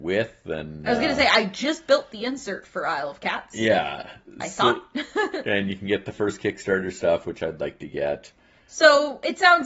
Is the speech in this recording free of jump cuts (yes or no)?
yes